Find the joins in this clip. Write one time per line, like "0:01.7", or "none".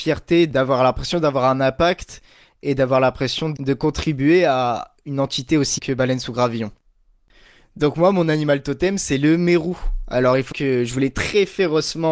0:05.8
0:10.5